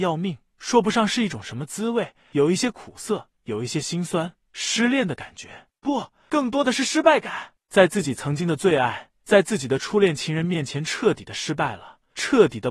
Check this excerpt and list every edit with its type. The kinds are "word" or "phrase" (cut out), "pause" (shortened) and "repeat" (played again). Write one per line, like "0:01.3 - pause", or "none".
none